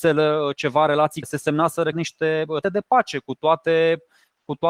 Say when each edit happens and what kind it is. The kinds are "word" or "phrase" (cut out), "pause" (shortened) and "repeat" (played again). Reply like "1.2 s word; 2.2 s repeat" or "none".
1.2 s word; 1.9 s word; 2.6 s word